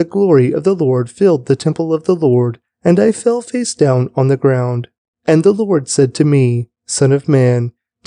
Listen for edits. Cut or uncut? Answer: uncut